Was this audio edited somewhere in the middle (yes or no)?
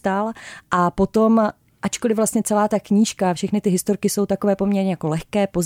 no